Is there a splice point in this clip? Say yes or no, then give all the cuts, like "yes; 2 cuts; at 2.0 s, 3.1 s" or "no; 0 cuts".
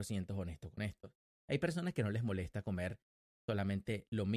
no; 0 cuts